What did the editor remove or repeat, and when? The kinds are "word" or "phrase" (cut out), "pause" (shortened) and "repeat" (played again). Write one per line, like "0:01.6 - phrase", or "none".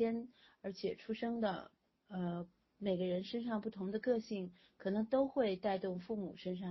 none